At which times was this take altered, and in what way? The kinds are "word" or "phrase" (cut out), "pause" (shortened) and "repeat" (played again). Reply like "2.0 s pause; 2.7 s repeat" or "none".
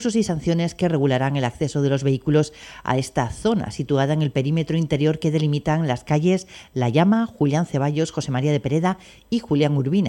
none